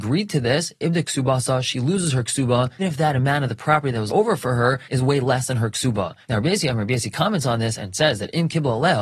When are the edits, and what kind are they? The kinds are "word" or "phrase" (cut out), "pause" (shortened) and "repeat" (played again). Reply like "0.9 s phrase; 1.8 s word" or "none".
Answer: 2.8 s word; 4.1 s word

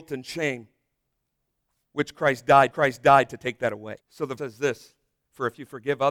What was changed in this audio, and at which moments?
2.7 s repeat; 4.0 s pause; 4.4 s word

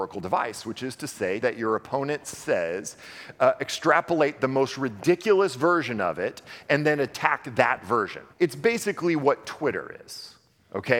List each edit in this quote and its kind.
1.4 s phrase; 8.3 s pause

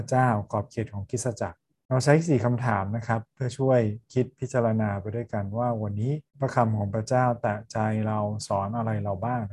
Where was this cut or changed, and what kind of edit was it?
1.7 s pause; 6.3 s pause

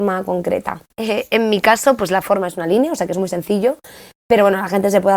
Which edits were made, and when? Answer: 0.9 s pause

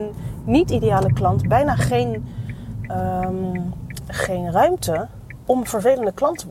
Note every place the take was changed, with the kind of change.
none

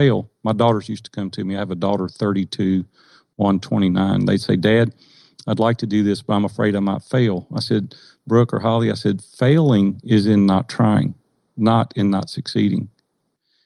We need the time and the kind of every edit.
none

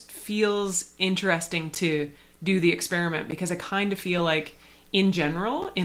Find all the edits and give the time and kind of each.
none

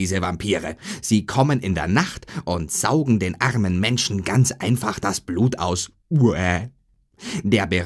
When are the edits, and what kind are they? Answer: none

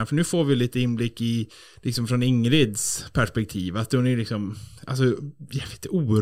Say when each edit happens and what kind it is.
none

